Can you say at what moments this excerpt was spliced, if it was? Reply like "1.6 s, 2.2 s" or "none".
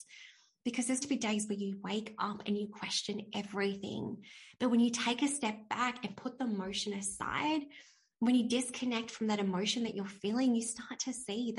1.0 s

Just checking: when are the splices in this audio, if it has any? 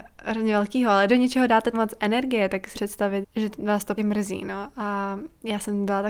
1.1 s, 1.7 s, 2.7 s, 3.2 s, 4.0 s

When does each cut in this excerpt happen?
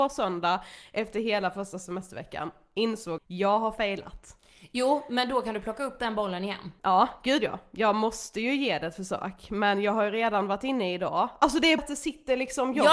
3.2 s, 6.8 s, 11.8 s

